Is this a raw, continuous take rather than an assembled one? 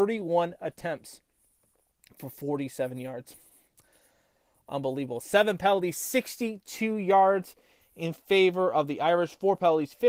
yes; 0 cuts

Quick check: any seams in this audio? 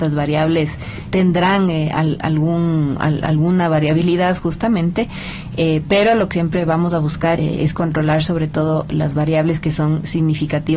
yes; 3 cuts; at 1.1 s, 6.3 s, 7.4 s

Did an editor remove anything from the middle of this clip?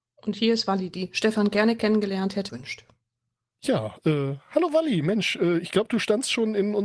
yes; 1 cut; at 2.5 s

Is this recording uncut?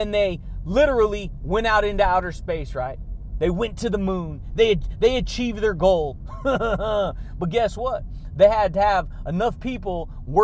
yes; 0 cuts

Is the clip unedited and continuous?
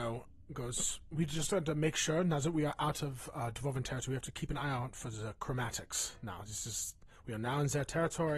yes; 0 cuts

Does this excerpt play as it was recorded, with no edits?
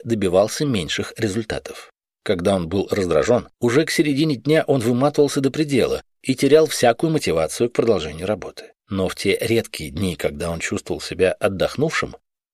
no; 3 cuts; at 2.0 s, 3.5 s, 8.8 s

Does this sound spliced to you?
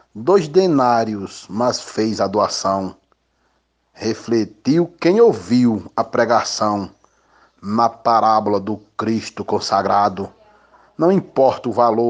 no; 0 cuts

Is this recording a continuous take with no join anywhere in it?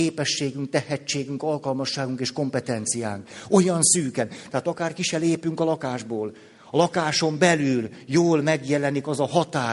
yes; 0 cuts

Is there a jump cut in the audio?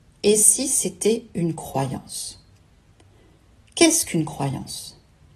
no; 0 cuts

